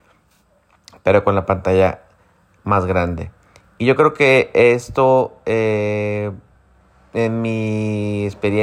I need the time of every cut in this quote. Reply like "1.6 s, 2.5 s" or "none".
none